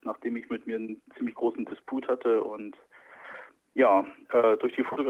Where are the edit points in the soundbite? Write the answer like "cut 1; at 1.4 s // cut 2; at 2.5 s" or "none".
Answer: none

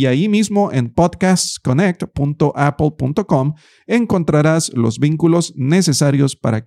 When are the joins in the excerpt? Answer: none

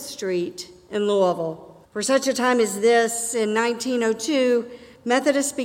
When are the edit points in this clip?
cut 1; at 1.8 s

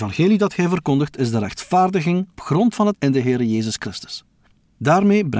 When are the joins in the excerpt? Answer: cut 1; at 2.4 s // cut 2; at 2.9 s

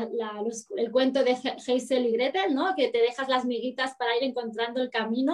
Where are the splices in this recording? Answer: none

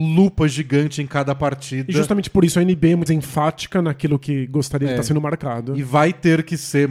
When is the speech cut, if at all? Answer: cut 1; at 3.1 s

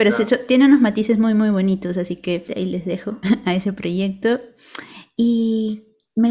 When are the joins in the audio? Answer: none

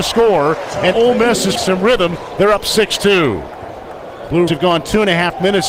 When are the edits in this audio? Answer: cut 1; at 0.9 s // cut 2; at 1.6 s // cut 3; at 4.5 s

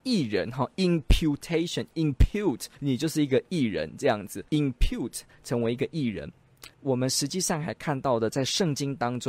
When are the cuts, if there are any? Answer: cut 1; at 2.7 s // cut 2; at 4.5 s // cut 3; at 6.7 s

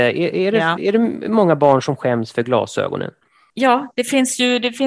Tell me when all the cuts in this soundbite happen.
none

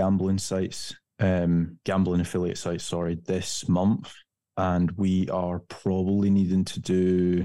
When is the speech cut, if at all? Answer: none

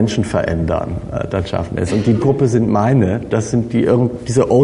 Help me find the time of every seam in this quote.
cut 1; at 2.2 s

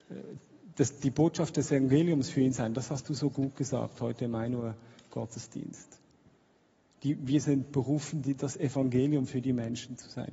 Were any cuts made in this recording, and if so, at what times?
none

